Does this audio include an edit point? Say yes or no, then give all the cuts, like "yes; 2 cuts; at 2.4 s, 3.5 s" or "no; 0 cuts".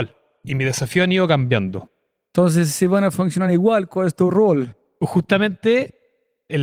no; 0 cuts